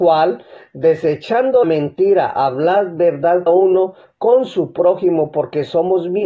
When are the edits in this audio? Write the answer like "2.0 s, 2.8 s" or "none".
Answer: 1.6 s, 3.5 s